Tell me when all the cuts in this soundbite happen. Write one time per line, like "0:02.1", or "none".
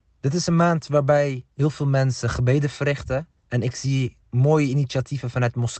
0:01.5
0:03.4
0:04.2